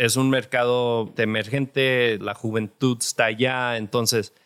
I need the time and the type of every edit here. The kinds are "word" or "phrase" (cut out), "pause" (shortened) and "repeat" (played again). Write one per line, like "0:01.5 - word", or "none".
0:01.2 - word
0:02.2 - word